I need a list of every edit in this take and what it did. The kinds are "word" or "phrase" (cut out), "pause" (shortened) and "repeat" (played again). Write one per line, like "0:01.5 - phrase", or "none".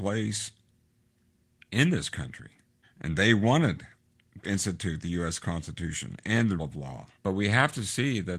0:02.8 - pause
0:04.4 - word
0:06.6 - word
0:07.2 - pause

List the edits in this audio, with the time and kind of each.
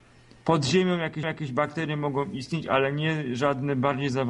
0:01.2 - repeat

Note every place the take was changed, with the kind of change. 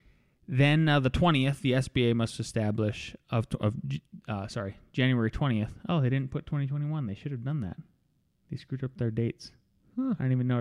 none

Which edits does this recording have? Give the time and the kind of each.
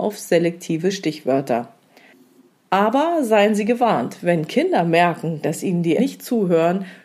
0:06.0 - word

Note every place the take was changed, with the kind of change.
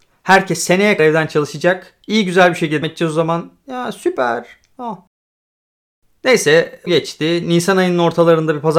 0:01.0 - word
0:02.8 - word
0:06.9 - word

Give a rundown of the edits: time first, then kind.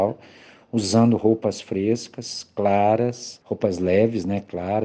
none

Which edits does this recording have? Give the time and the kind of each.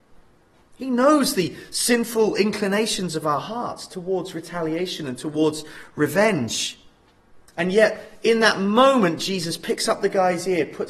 0:07.5 - pause

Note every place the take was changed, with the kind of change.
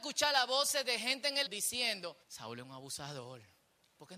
0:01.5 - word
0:02.2 - pause

